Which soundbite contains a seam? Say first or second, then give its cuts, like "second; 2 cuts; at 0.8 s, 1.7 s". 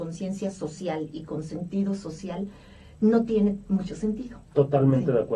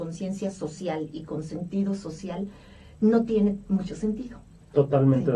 first; 1 cut; at 4.5 s